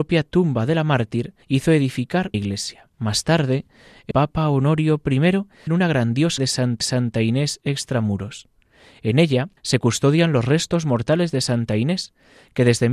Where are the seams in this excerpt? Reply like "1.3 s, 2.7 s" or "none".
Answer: 1.4 s, 2.3 s, 2.9 s, 4.1 s, 5.7 s, 6.4 s, 6.8 s, 9.6 s